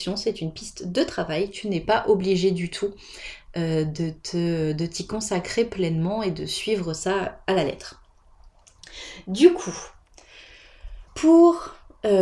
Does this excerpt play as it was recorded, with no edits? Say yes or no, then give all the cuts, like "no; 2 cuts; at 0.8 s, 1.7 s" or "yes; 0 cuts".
no; 1 cut; at 11.1 s